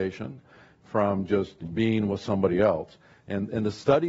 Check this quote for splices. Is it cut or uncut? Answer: cut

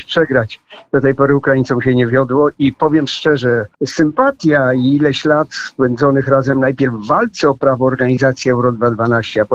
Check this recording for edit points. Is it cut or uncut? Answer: cut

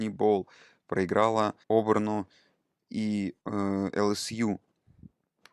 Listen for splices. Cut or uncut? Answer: cut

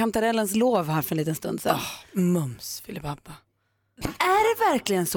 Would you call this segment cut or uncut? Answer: uncut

